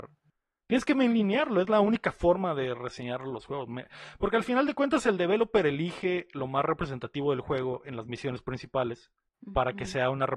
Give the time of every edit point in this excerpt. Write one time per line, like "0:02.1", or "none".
0:09.3